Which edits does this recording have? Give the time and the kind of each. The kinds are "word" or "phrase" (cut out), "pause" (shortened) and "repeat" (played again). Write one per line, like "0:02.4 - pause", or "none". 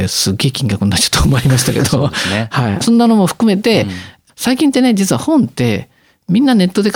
none